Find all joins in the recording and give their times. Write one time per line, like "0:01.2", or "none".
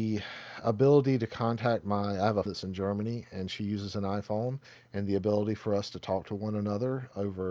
0:02.5